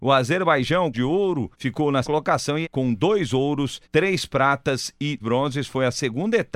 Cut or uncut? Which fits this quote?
cut